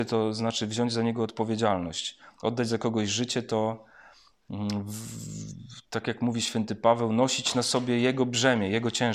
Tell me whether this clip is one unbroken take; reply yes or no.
yes